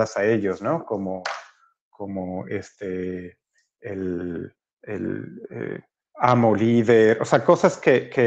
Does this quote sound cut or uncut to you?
uncut